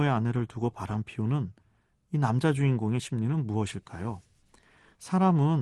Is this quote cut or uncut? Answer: uncut